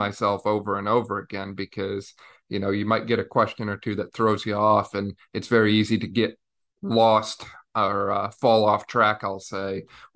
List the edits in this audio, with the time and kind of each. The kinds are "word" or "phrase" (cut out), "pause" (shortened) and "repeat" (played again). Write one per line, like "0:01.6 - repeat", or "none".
none